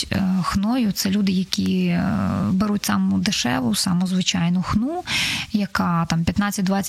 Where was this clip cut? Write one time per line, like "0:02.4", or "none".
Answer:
none

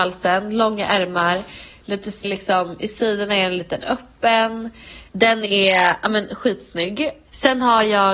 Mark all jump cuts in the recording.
0:02.2

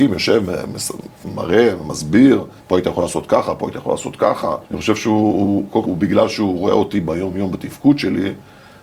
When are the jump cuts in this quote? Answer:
0:02.6
0:04.7
0:05.8

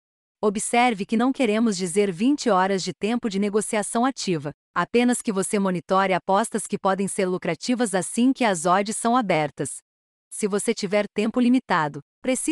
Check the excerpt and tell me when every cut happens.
none

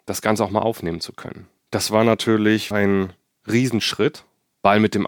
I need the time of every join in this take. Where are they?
0:01.6
0:02.7

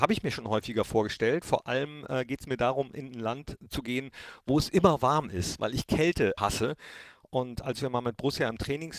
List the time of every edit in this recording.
0:06.4

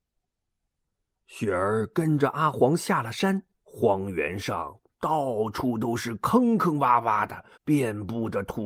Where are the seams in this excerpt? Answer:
0:03.6
0:07.5

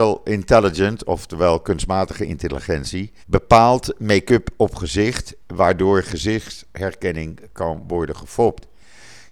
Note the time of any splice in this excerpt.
0:03.2

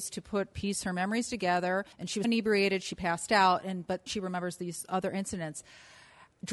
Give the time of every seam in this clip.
0:01.9
0:02.2
0:04.1

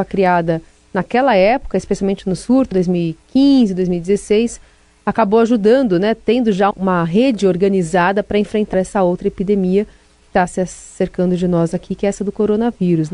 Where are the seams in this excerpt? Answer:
0:02.7
0:06.7
0:08.7

